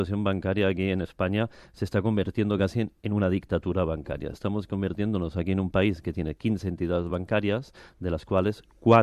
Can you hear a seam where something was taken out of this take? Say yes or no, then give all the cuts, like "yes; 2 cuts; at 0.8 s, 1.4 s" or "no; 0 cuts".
no; 0 cuts